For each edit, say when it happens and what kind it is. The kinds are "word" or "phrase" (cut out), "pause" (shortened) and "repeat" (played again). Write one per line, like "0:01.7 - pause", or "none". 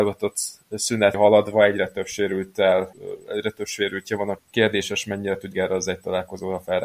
0:01.1 - word
0:04.4 - word
0:05.5 - word